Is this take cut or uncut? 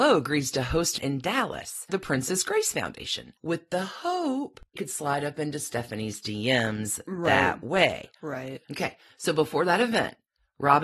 cut